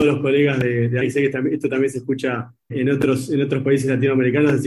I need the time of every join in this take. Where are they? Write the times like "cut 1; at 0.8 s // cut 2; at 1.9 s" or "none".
cut 1; at 1.0 s // cut 2; at 2.7 s